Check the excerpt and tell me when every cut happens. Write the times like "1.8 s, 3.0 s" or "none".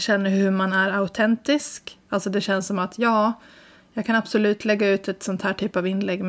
none